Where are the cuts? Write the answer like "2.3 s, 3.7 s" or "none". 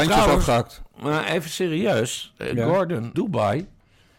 3.1 s

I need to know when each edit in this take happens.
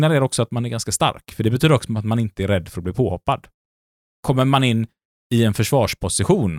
none

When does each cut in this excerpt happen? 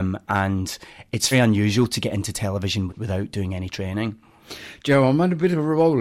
1.3 s, 2.9 s

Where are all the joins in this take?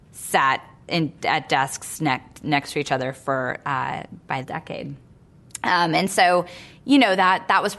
4.4 s

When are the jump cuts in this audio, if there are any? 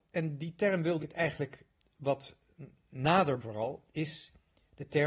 1.0 s, 3.4 s

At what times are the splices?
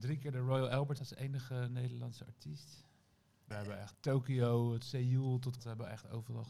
1.0 s, 3.5 s, 3.9 s, 4.8 s, 5.6 s

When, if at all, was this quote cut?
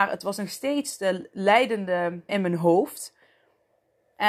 2.3 s

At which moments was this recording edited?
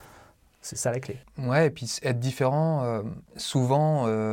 3.3 s

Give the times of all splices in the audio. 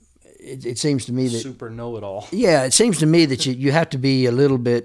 none

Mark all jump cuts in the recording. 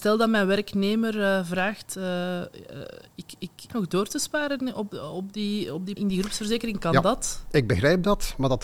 3.7 s, 6.0 s

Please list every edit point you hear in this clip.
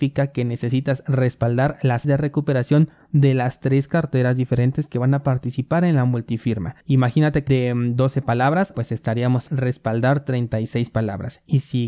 2.0 s, 6.8 s, 7.5 s, 8.7 s, 9.5 s

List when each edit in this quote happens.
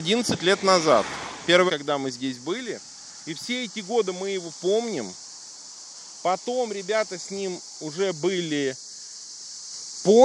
1.7 s

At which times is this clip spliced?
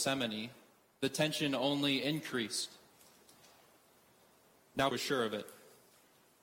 4.9 s

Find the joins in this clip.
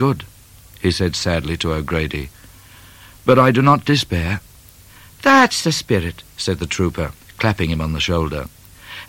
none

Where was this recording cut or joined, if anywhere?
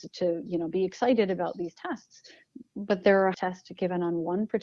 3.3 s

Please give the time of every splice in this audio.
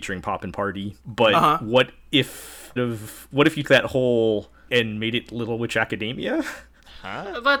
1.0 s, 2.8 s, 3.6 s, 4.7 s

